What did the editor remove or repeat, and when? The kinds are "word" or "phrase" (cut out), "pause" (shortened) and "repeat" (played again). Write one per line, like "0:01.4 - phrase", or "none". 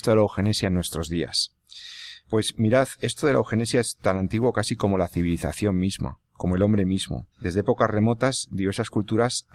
0:02.2 - pause
0:06.2 - pause
0:07.3 - pause